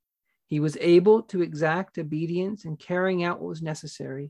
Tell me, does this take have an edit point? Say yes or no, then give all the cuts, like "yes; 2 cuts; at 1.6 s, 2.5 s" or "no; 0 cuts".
no; 0 cuts